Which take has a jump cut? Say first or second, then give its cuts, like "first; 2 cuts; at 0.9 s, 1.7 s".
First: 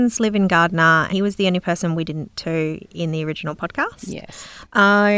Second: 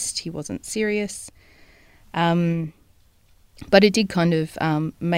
first; 2 cuts; at 1.1 s, 2.4 s